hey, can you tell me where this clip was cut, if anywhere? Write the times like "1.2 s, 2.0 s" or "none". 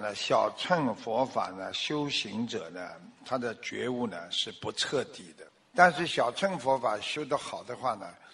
5.6 s